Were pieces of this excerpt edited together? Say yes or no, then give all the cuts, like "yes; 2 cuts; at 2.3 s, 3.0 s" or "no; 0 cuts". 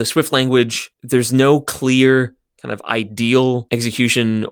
no; 0 cuts